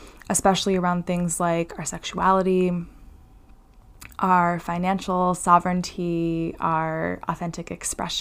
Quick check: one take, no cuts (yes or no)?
yes